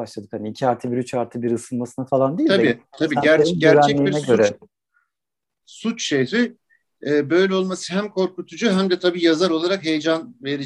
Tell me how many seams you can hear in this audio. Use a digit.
0